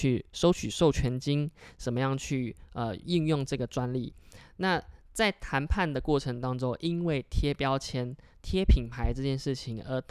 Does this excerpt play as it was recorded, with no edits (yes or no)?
yes